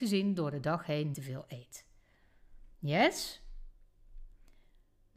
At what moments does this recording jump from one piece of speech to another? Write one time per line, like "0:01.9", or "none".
0:01.1
0:02.7